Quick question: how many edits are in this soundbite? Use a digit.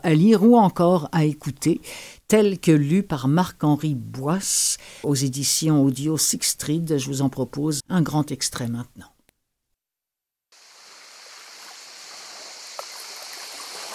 2